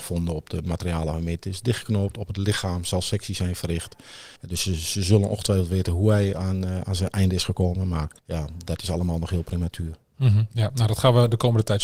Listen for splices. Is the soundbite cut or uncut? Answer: cut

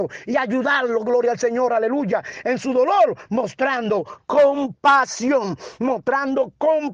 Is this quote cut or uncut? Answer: uncut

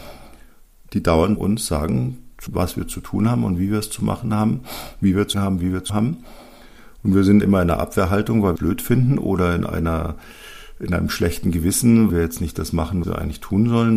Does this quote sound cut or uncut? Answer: cut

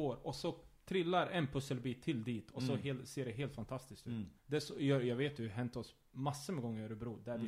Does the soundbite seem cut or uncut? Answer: cut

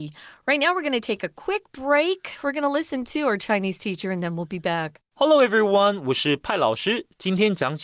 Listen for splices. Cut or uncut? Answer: cut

